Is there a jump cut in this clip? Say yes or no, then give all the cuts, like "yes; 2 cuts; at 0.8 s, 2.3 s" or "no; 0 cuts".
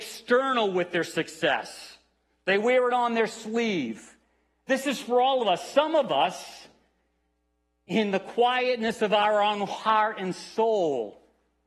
no; 0 cuts